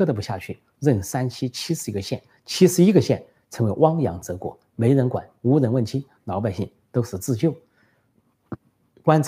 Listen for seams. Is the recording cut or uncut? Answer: uncut